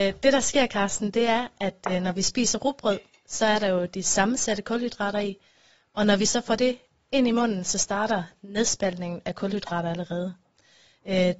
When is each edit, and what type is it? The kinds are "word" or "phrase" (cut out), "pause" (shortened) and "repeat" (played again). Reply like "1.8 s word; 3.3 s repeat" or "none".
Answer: none